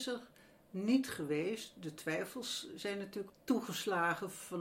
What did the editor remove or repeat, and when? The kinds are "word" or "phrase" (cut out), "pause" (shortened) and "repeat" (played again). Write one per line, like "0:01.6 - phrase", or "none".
0:03.3 - word